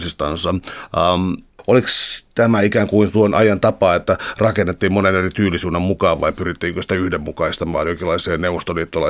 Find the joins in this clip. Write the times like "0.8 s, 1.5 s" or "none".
2.3 s